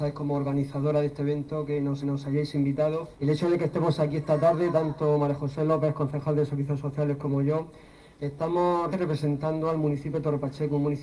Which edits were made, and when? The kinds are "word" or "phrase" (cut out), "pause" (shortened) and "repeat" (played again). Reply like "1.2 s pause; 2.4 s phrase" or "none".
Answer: 2.0 s repeat; 3.1 s pause; 8.9 s word